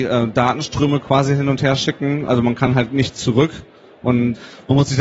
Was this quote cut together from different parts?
no; 0 cuts

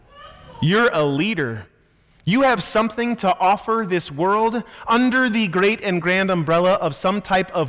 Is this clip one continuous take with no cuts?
yes; 0 cuts

